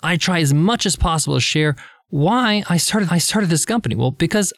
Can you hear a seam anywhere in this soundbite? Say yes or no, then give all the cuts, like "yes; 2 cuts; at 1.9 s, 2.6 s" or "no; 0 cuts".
yes; 1 cut; at 3.1 s